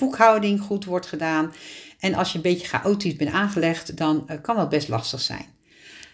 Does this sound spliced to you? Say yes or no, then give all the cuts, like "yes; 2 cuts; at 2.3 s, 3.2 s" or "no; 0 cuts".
no; 0 cuts